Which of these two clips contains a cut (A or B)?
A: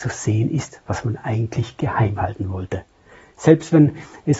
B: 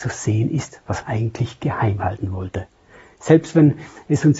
B